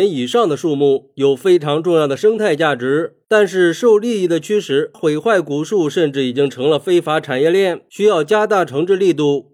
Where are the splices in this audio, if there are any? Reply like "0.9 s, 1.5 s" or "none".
4.9 s